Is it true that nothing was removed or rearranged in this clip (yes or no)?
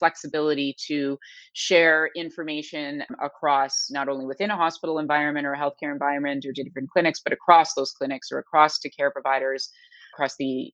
yes